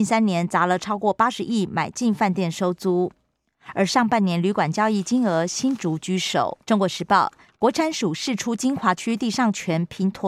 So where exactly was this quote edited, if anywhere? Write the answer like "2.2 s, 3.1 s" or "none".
6.6 s

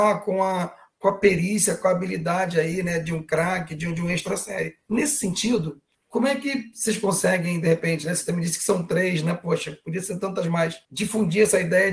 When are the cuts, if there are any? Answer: 4.8 s, 5.9 s, 10.8 s

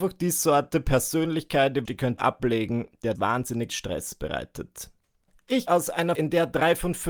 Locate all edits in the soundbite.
1.8 s, 2.2 s, 3.1 s, 3.7 s, 5.7 s, 6.1 s

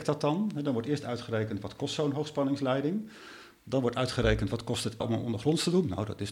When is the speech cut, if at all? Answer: 5.0 s

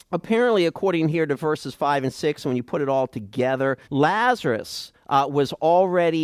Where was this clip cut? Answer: 3.8 s

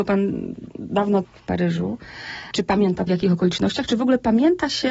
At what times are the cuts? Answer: 1.2 s, 3.1 s

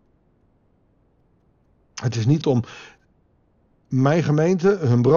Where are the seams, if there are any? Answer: 2.4 s

